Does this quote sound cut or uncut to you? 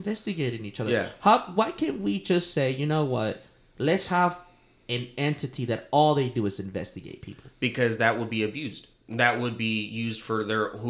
uncut